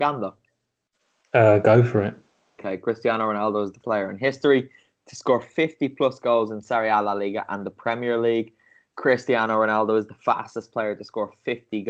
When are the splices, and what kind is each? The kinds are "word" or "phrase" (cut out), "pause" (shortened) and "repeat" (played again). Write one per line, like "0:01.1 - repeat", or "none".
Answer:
0:03.8 - word